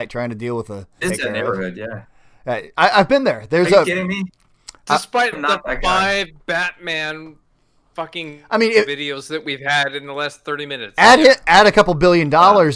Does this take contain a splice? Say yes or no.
yes